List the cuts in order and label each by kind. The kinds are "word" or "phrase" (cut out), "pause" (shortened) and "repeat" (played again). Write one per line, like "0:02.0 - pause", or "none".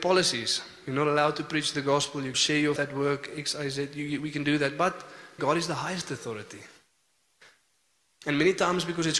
0:02.3 - word
0:02.8 - word
0:05.4 - word